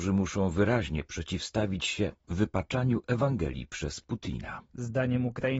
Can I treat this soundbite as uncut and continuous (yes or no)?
yes